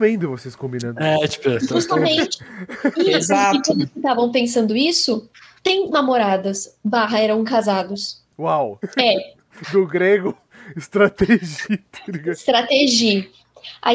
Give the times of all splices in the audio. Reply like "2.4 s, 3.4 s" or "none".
5.9 s, 8.3 s